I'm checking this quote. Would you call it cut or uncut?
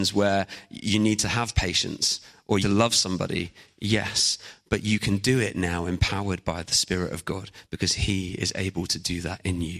cut